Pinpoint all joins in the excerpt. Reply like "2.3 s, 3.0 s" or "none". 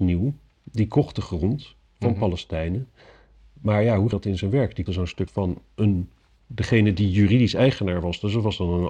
4.1 s, 4.9 s, 5.3 s